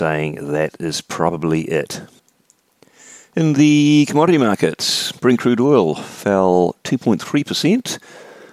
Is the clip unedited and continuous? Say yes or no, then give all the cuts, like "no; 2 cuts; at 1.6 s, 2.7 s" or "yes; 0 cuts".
yes; 0 cuts